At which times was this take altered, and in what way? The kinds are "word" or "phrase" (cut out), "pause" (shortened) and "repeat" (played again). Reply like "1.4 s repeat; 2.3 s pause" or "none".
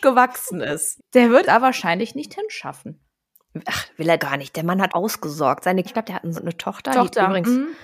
1.0 s word; 1.4 s word; 4.2 s word; 4.9 s word; 5.9 s word; 6.4 s word